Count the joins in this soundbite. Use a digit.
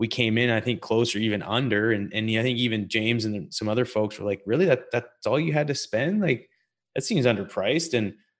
0